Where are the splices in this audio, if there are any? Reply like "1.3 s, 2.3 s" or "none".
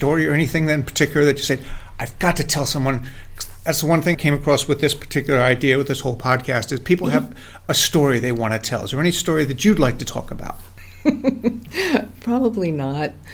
4.1 s